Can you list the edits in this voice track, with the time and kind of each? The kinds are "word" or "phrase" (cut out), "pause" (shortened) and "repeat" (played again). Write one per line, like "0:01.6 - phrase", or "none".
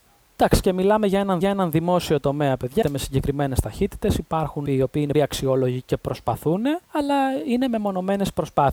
0:01.4 - repeat
0:02.8 - phrase
0:04.7 - word
0:05.1 - word
0:06.8 - pause